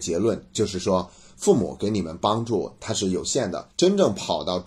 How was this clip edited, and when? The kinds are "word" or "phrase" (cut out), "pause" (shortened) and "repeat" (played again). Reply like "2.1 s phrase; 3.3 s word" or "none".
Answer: 3.7 s pause